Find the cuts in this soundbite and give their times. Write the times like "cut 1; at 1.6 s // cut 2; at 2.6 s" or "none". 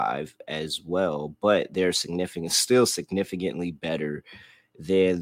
none